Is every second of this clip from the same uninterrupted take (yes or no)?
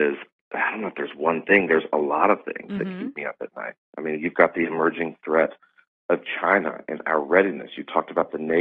yes